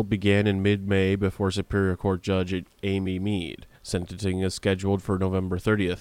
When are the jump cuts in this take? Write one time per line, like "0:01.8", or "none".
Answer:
0:03.7